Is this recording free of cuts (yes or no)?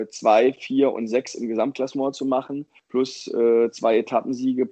yes